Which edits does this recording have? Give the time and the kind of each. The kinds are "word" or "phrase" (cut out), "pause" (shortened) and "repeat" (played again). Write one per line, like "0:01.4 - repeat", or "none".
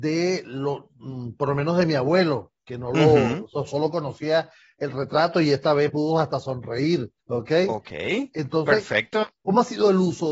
0:02.6 - pause
0:03.7 - word
0:05.9 - word
0:07.2 - pause